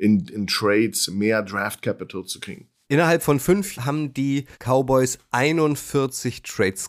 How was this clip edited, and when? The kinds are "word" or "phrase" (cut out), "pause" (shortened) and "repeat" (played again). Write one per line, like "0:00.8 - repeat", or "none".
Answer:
0:03.7 - word
0:04.5 - pause